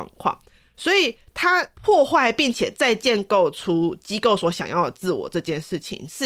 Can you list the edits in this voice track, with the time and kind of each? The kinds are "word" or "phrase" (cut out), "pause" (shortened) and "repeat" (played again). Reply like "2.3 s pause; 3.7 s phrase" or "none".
1.7 s pause